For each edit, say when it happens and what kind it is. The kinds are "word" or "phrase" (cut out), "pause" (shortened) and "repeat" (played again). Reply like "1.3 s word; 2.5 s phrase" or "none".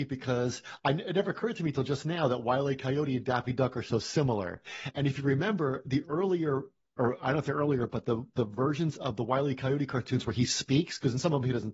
none